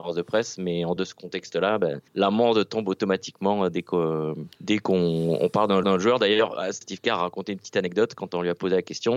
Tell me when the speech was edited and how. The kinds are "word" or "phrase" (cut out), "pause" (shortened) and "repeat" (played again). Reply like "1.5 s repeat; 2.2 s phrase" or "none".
1.0 s word; 2.1 s pause; 4.5 s pause; 5.8 s repeat; 6.8 s word